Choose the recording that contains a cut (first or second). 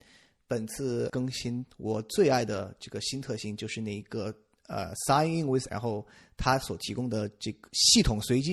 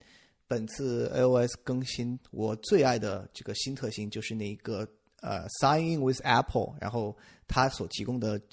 first